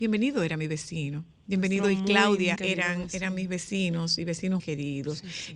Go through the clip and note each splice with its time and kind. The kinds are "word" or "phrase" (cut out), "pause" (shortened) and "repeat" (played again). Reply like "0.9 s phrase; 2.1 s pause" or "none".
2.6 s word; 4.6 s word